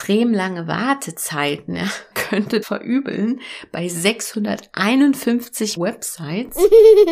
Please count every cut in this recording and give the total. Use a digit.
3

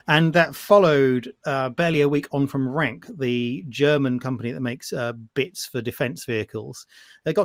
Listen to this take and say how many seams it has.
0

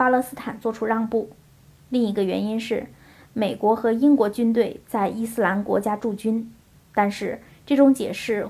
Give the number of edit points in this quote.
0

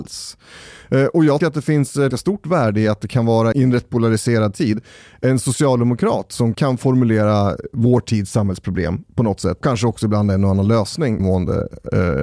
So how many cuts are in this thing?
6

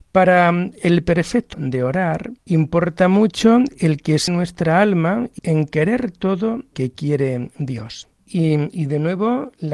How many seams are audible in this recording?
5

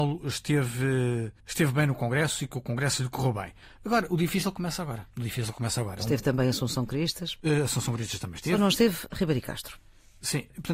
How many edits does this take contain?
3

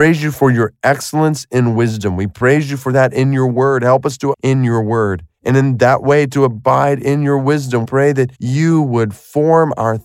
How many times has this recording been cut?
4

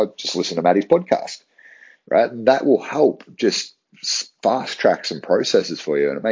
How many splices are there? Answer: 0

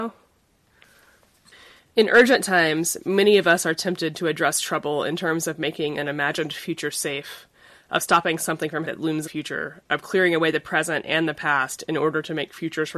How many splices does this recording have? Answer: 2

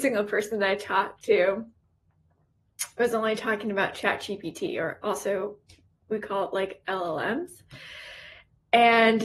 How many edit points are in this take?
0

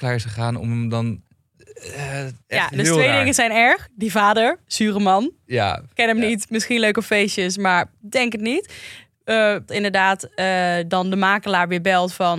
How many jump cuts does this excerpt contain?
2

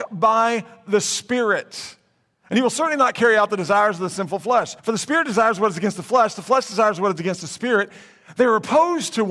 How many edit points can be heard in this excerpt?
1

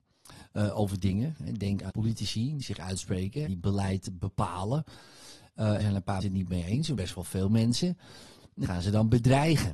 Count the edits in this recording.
7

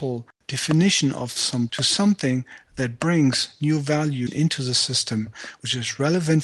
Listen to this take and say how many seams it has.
2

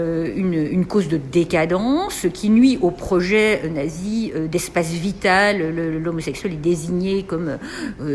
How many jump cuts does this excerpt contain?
0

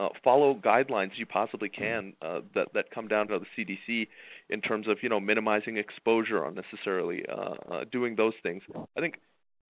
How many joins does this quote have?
2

